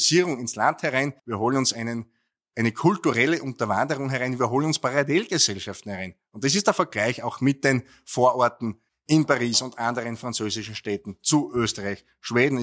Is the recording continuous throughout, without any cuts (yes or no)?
no